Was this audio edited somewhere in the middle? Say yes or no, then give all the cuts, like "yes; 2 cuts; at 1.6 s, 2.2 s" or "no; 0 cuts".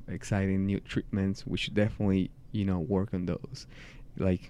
no; 0 cuts